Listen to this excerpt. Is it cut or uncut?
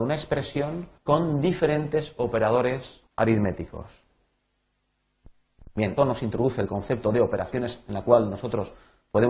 cut